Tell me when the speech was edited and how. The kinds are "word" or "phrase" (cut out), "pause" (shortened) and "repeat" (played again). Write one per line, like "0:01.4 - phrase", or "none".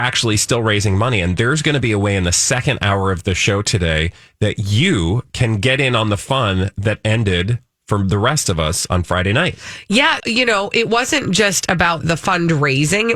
0:10.2 - word
0:12.0 - word